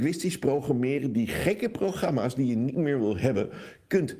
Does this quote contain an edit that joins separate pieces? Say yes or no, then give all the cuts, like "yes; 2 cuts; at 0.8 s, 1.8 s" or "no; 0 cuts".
no; 0 cuts